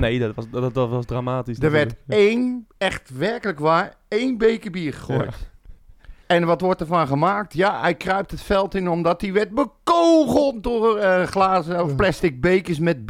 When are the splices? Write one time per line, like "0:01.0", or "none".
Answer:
0:02.7
0:06.2